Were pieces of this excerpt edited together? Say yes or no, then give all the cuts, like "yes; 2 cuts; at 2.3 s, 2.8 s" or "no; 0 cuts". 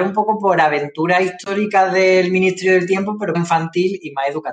yes; 1 cut; at 3.3 s